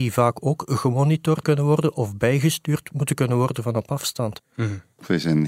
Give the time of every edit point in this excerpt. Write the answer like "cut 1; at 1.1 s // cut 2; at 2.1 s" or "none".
cut 1; at 1.4 s